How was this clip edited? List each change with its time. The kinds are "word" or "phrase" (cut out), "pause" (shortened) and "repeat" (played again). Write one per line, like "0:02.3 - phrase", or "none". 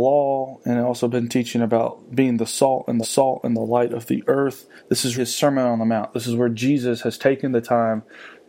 0:03.0 - repeat
0:04.8 - pause
0:05.1 - word